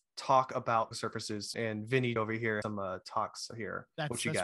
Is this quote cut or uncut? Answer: cut